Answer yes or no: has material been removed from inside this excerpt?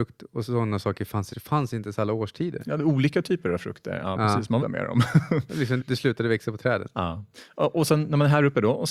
yes